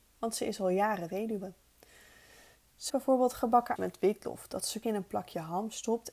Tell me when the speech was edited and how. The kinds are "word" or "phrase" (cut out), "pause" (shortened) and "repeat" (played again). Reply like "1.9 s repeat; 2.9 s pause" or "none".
2.9 s word; 3.8 s word; 4.8 s word